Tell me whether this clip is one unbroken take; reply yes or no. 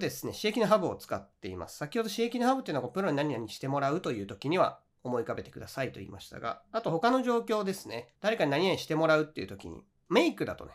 no